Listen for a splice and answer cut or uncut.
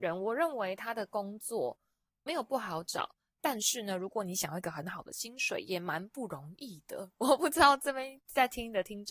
cut